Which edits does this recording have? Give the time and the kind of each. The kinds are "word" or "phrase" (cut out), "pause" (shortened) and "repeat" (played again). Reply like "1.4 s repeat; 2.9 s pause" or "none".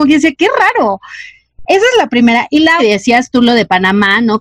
2.8 s phrase